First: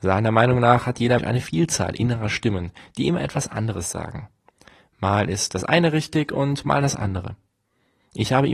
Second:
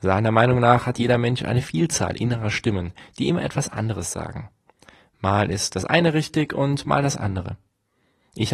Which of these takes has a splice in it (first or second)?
first